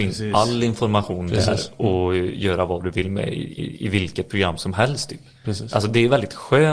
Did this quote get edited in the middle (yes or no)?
yes